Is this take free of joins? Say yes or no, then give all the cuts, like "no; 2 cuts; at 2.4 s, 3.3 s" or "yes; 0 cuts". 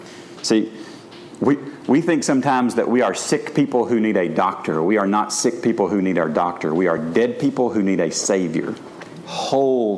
yes; 0 cuts